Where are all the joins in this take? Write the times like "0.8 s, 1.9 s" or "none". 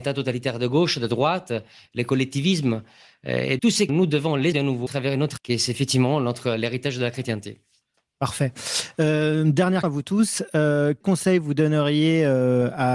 3.6 s, 3.9 s, 4.5 s, 4.9 s, 5.4 s, 9.8 s, 11.0 s